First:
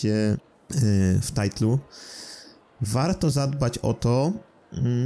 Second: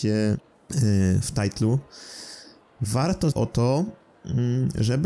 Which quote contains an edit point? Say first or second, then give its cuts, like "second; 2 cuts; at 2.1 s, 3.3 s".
second; 1 cut; at 3.3 s